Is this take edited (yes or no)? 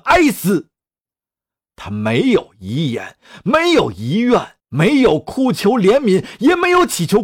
yes